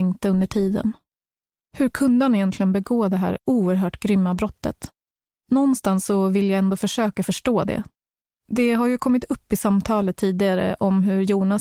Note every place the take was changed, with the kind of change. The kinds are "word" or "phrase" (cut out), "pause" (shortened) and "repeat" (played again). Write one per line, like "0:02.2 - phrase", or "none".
none